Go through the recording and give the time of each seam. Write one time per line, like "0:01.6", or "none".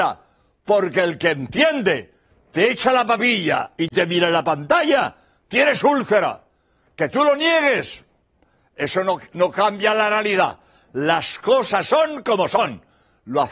none